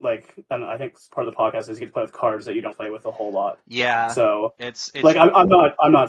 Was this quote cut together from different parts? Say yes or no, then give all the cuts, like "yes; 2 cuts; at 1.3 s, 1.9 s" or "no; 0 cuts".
yes; 1 cut; at 2.7 s